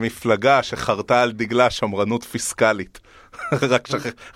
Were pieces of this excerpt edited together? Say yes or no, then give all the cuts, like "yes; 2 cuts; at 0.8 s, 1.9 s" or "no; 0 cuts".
no; 0 cuts